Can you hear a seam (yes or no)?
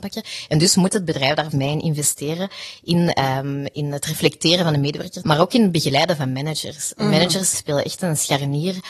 yes